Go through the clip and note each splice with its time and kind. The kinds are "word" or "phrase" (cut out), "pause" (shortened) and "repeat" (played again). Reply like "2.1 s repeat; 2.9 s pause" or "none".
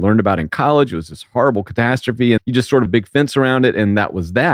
2.4 s word; 2.9 s phrase